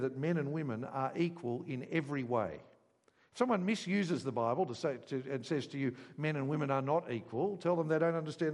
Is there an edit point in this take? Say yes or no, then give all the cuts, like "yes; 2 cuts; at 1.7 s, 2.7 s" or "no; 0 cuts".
no; 0 cuts